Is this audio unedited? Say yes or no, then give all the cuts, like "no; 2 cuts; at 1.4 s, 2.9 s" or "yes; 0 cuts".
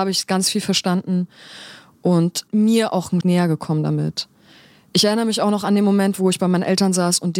no; 2 cuts; at 2.5 s, 3.2 s